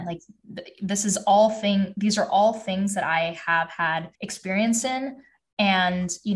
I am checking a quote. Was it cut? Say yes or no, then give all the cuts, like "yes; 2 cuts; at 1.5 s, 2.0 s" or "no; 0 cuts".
yes; 1 cut; at 4.1 s